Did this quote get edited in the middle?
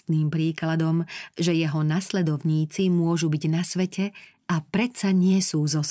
no; 0 cuts

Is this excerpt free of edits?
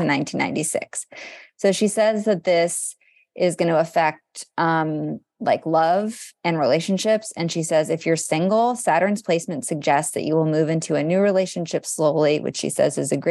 yes; 0 cuts

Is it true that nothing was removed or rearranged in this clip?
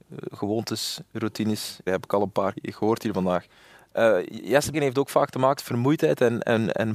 no; 4 cuts; at 1.9 s, 2.5 s, 4.7 s, 5.6 s

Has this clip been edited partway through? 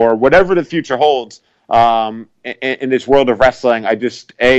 no; 0 cuts

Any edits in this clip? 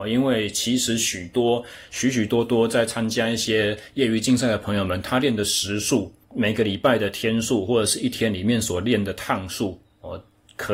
yes; 1 cut; at 6.2 s

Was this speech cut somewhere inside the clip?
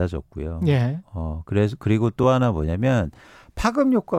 no; 0 cuts

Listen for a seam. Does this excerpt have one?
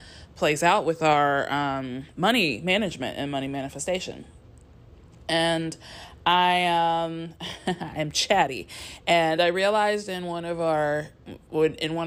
no; 0 cuts

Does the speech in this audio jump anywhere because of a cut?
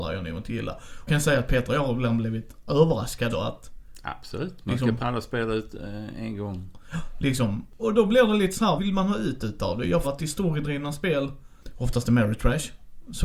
yes; 6 cuts; at 1.1 s, 3.3 s, 5.0 s, 7.8 s, 8.8 s, 10.0 s

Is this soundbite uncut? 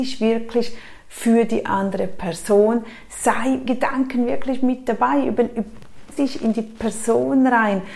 no; 2 cuts; at 3.7 s, 6.1 s

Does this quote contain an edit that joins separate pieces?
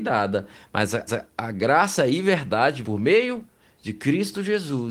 yes; 2 cuts; at 1.1 s, 2.8 s

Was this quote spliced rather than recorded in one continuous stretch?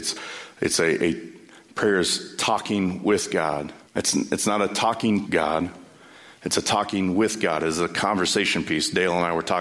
yes; 2 cuts; at 3.9 s, 5.3 s

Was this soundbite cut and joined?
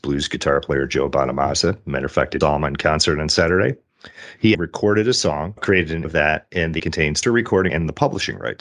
yes; 6 cuts; at 2.4 s, 4.5 s, 6.0 s, 6.8 s, 7.2 s, 7.7 s

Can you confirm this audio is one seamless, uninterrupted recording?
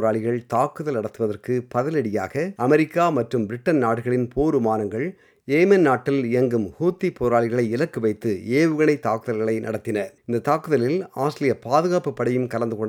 no; 2 cuts; at 2.6 s, 10.2 s

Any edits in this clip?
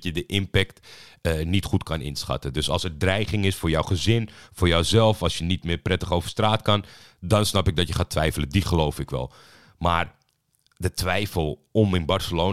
no; 0 cuts

